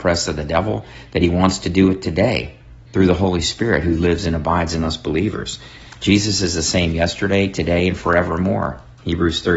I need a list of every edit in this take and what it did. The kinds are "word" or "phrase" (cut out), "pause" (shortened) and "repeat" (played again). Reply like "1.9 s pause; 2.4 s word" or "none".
2.8 s pause